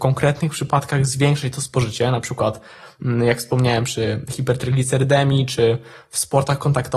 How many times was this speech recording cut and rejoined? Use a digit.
0